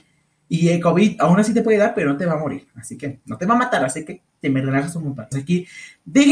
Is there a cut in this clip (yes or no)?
yes